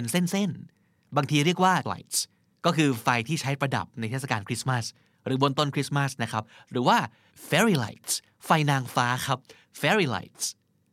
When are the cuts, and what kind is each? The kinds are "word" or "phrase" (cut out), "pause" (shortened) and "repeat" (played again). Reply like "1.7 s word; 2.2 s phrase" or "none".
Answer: 1.8 s word